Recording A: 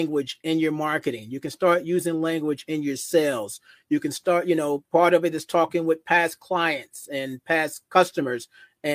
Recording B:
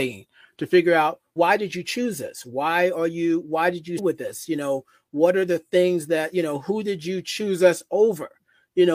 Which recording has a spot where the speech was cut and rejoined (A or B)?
B